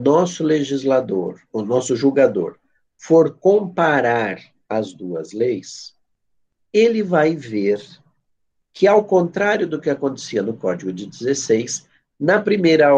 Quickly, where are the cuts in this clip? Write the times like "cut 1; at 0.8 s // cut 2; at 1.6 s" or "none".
none